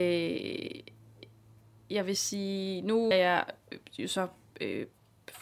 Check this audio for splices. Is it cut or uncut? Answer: cut